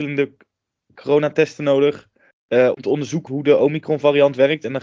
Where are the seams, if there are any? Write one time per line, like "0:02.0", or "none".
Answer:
0:02.3
0:02.7
0:03.3